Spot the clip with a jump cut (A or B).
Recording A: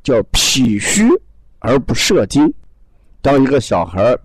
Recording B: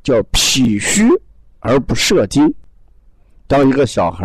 A